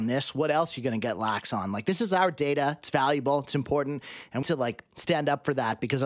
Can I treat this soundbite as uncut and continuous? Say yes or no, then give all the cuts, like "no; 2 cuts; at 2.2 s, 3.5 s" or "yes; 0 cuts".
no; 1 cut; at 4.4 s